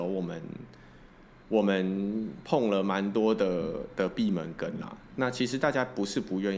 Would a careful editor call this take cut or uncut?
uncut